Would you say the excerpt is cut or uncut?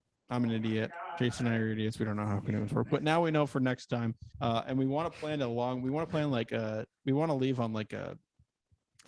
cut